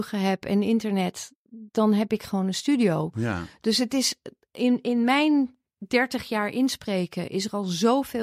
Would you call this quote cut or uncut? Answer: uncut